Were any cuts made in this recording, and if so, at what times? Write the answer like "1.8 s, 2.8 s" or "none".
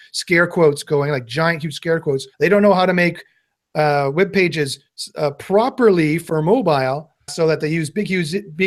2.3 s, 7.3 s

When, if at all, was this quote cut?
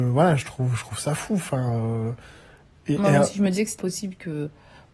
3.8 s

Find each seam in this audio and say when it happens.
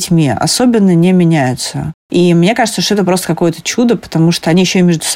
none

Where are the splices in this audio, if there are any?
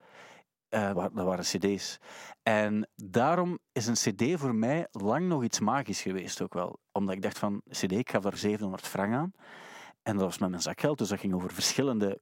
0.9 s, 2.9 s, 8.4 s

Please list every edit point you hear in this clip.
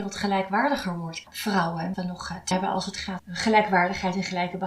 1.2 s, 1.9 s, 2.5 s, 3.2 s

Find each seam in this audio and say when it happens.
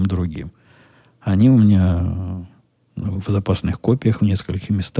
none

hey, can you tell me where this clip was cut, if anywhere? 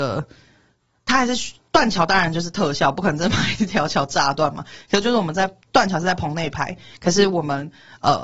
5.6 s

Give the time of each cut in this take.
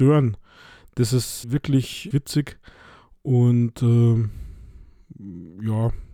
1.4 s, 2.1 s

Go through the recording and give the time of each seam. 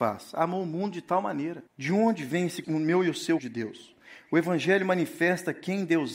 1.7 s, 2.6 s, 3.4 s

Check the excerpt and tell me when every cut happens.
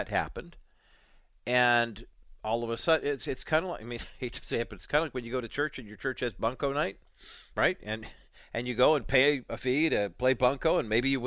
7.5 s

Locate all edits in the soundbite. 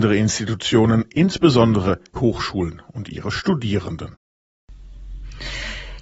2.2 s

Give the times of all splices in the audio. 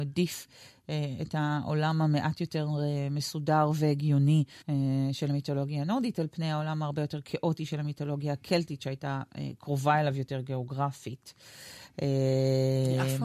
4.6 s

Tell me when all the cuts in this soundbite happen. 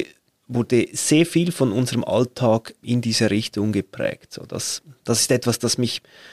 2.8 s

